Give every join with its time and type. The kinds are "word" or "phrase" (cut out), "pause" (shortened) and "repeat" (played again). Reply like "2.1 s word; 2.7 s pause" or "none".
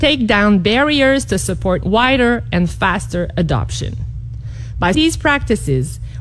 1.8 s word; 4.9 s word